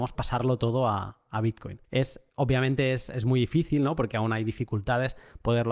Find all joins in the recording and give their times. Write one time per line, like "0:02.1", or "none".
0:01.8